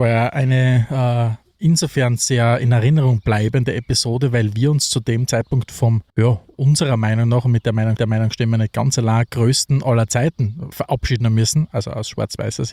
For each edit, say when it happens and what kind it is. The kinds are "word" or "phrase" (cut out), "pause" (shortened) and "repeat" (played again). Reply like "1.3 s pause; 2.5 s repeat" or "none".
6.1 s pause; 8.0 s repeat; 10.7 s word